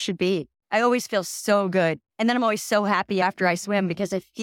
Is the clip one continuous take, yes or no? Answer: no